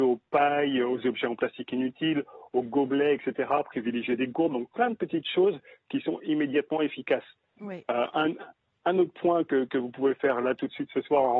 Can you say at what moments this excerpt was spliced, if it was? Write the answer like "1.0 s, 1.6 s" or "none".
none